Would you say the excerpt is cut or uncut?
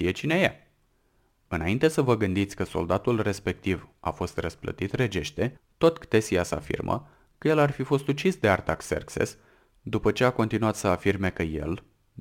uncut